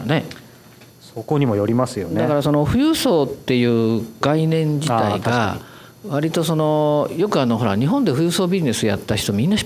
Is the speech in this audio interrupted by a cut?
no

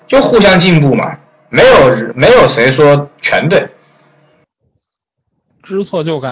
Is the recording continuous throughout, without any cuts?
yes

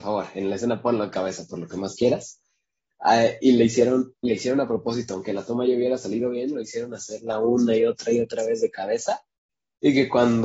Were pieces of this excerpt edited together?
no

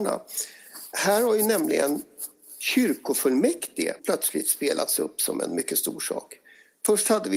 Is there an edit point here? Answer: yes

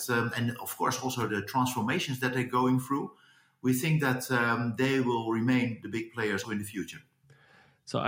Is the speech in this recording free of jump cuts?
no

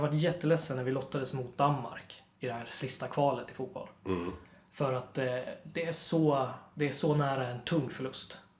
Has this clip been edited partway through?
no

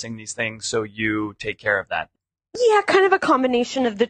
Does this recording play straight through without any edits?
yes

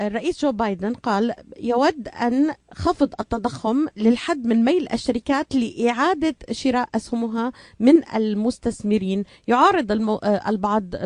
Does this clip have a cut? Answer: no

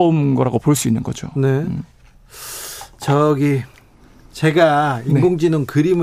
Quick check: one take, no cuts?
yes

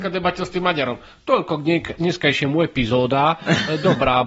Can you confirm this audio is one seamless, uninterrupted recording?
yes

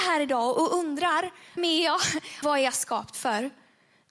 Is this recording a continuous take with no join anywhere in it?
no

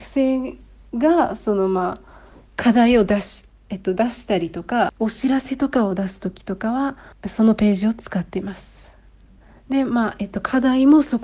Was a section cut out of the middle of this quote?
no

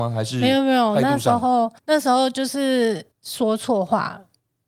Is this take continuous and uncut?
no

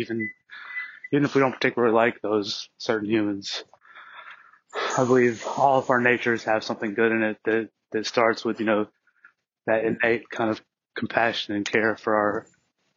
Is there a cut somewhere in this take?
no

